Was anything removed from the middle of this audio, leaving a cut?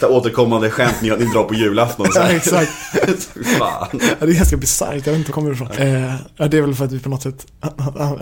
yes; 2 cuts; at 5.3 s, 5.8 s

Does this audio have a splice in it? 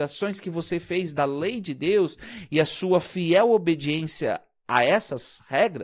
no; 0 cuts

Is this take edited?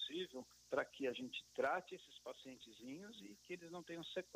no; 0 cuts

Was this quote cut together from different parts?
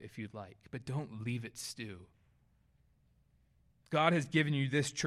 no; 0 cuts

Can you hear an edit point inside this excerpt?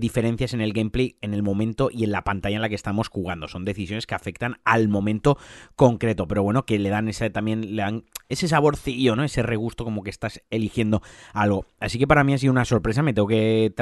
no; 0 cuts

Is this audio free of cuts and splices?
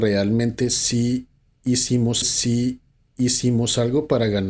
no; 1 cut; at 2.2 s

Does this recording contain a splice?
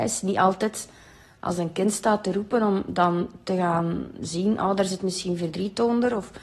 no; 0 cuts

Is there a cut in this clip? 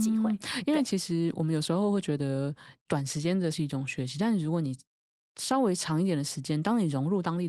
yes; 1 cut; at 3.5 s

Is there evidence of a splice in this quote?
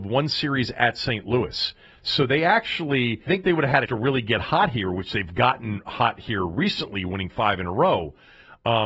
yes; 2 cuts; at 3.3 s, 3.9 s

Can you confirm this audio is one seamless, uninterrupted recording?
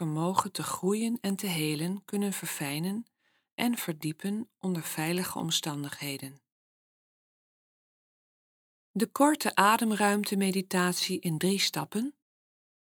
yes; 0 cuts

